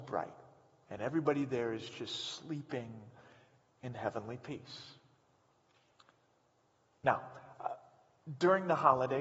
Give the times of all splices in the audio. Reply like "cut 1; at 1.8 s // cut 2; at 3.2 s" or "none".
none